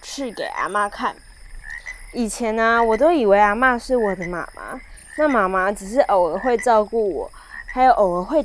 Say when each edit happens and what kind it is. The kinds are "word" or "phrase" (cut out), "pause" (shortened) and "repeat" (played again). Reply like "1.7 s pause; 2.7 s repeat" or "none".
none